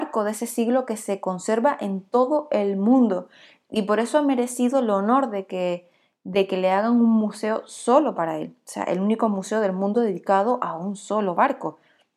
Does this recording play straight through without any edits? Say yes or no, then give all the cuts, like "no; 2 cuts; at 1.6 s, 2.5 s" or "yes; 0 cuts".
yes; 0 cuts